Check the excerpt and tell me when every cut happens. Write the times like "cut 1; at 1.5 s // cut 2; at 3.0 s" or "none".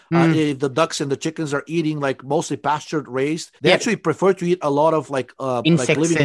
cut 1; at 3.6 s